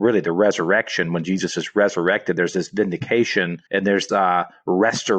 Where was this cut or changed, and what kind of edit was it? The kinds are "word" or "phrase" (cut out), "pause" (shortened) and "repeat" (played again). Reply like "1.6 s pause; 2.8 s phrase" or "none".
3.7 s pause; 4.1 s word